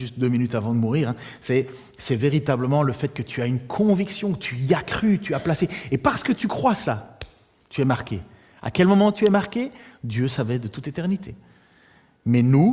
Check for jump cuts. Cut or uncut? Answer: uncut